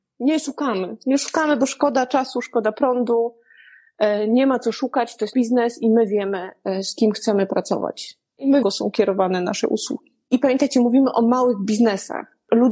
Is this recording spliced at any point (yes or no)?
yes